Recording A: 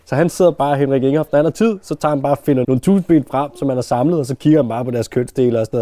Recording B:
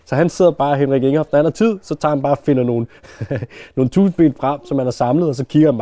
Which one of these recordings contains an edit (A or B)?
A